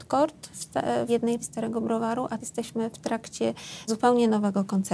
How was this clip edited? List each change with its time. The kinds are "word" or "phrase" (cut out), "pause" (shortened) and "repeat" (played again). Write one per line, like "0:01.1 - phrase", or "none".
0:01.1 - word
0:01.4 - word
0:02.4 - word
0:03.9 - word